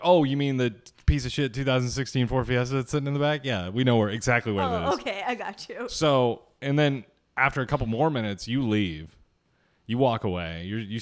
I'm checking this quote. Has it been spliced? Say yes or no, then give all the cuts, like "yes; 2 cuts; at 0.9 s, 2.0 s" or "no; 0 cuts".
no; 0 cuts